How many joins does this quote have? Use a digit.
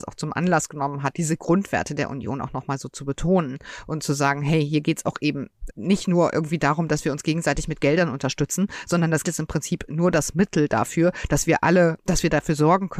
3